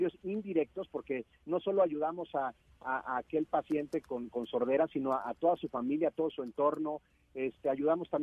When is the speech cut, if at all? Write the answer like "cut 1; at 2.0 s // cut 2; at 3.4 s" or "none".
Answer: none